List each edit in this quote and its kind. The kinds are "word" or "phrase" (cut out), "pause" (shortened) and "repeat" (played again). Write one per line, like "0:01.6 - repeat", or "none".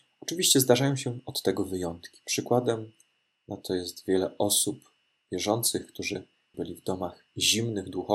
0:06.5 - word